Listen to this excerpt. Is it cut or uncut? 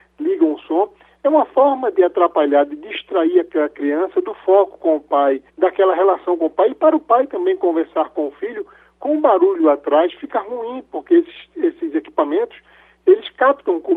cut